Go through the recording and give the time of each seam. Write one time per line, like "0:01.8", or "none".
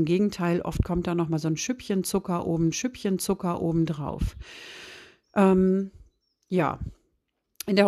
0:02.7

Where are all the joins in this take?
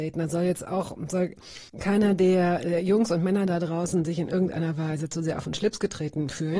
0:01.7

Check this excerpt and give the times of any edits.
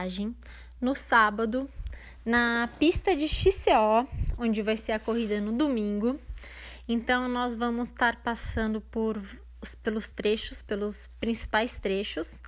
none

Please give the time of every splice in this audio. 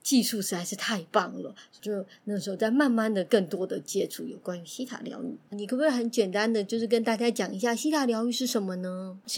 0:05.5

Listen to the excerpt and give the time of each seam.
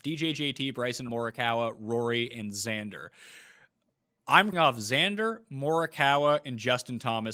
0:01.1
0:04.5

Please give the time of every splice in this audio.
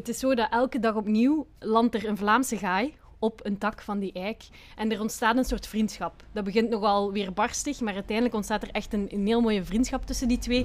none

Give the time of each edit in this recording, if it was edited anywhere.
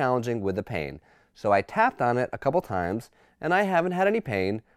none

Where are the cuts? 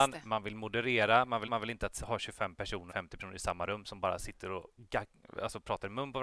0:01.5
0:02.9

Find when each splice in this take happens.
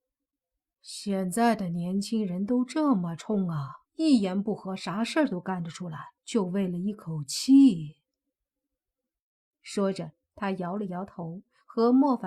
0:03.9
0:06.2

